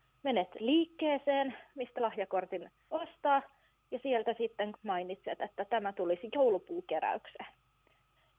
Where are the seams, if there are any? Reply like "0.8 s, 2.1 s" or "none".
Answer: 2.0 s, 2.8 s, 4.7 s